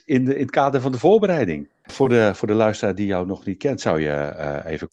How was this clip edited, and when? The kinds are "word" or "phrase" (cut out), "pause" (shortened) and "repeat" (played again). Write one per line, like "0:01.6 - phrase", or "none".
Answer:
none